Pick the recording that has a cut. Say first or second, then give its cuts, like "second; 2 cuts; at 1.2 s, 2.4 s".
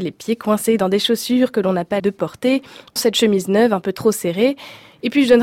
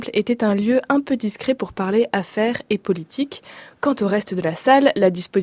first; 2 cuts; at 2.0 s, 3.0 s